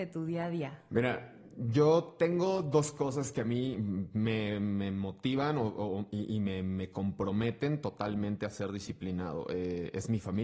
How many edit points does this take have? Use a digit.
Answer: 0